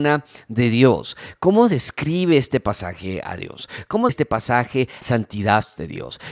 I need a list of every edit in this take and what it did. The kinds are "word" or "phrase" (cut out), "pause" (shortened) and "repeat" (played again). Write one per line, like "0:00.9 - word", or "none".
0:04.1 - word
0:05.0 - word

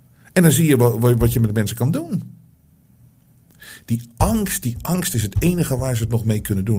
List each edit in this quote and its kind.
none

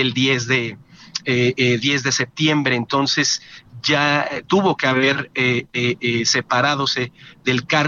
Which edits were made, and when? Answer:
none

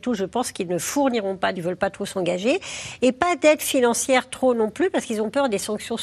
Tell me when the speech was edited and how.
0:01.6 - phrase

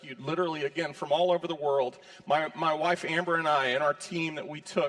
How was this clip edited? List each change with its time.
none

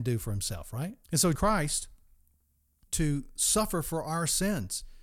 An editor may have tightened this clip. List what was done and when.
0:01.0 - pause
0:01.4 - word
0:02.9 - word

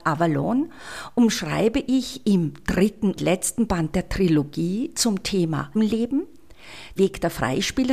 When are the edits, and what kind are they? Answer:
0:03.2 - word
0:05.7 - word
0:07.0 - word

